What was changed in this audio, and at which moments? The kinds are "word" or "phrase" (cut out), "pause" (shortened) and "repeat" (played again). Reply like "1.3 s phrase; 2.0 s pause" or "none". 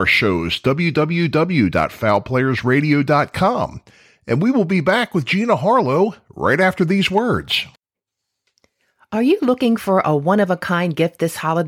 none